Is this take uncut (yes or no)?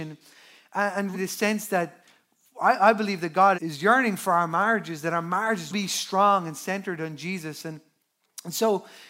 no